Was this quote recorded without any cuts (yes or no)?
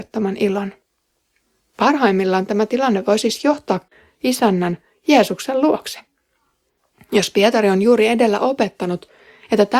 yes